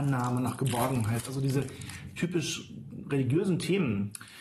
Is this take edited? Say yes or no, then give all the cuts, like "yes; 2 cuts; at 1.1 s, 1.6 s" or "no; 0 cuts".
no; 0 cuts